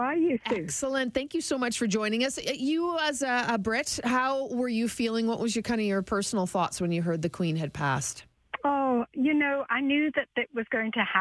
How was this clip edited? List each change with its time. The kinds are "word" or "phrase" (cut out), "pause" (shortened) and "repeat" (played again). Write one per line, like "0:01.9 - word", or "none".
none